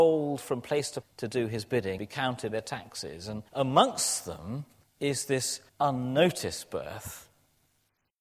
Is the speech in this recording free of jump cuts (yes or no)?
no